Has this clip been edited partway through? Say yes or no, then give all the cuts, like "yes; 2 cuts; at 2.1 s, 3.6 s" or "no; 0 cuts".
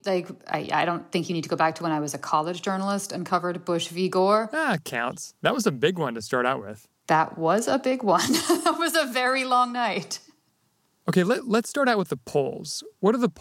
yes; 1 cut; at 5.4 s